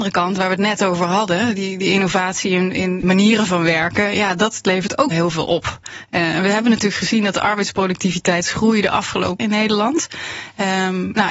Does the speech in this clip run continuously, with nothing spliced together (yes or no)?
no